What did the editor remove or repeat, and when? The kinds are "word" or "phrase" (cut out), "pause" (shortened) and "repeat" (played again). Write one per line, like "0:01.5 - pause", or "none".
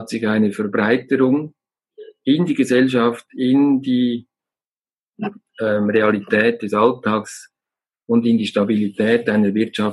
none